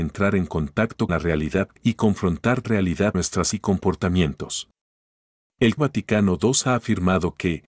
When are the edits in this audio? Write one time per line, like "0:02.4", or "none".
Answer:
0:01.1
0:01.8
0:02.6
0:03.1
0:03.5
0:05.8

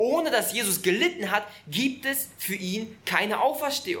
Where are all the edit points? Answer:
none

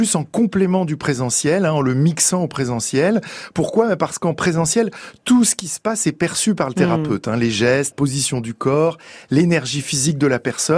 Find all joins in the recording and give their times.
0:07.9

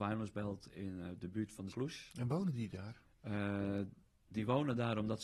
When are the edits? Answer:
0:01.7
0:02.3

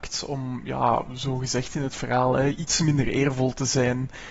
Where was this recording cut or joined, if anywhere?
none

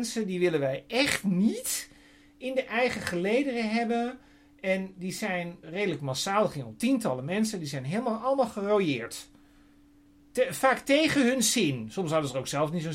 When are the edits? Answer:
0:05.6

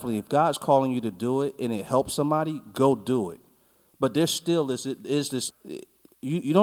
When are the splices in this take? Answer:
0:05.5

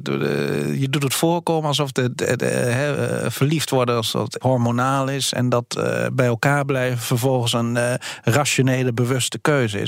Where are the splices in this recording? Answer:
0:04.4

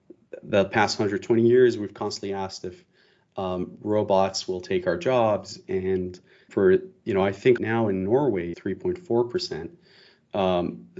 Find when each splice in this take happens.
0:06.5
0:07.6
0:08.5

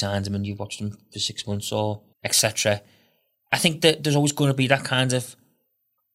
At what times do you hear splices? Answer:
0:02.1

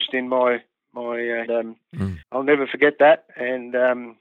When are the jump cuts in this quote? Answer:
0:01.5
0:02.2

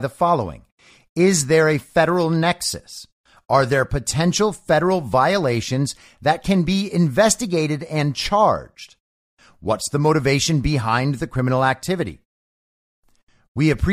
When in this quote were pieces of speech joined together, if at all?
none

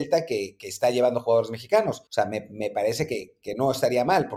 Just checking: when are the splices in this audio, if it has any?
0:02.1

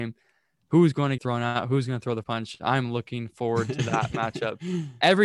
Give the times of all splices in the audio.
0:01.2
0:02.2

